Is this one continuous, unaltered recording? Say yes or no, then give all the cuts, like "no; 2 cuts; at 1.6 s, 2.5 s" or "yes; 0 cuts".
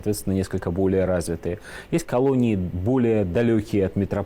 yes; 0 cuts